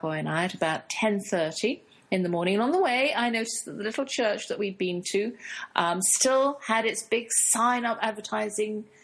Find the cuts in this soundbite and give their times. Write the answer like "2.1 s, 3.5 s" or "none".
none